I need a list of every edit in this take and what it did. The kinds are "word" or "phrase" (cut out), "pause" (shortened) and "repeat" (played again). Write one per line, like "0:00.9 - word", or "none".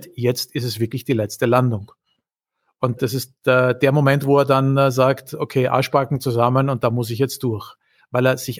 0:03.0 - word

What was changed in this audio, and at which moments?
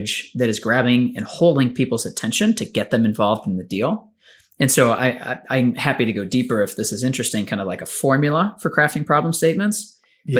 none

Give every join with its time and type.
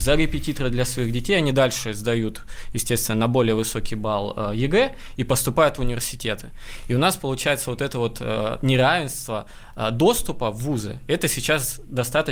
none

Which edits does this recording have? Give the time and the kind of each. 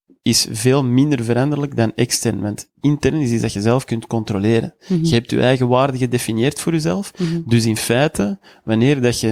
none

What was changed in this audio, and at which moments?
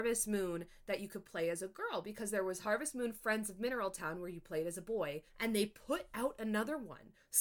0:05.3 - pause

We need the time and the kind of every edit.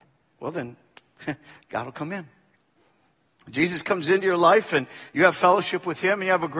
none

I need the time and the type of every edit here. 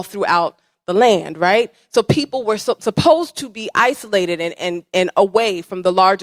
none

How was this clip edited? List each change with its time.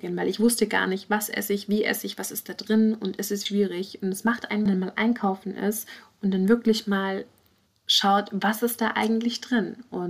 0:03.5 - word
0:04.7 - phrase
0:07.7 - pause

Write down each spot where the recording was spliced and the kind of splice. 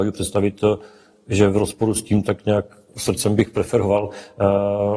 0:02.2 - word

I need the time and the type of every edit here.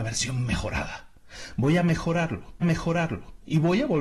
0:02.6 - repeat

